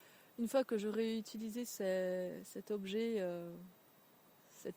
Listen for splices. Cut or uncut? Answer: uncut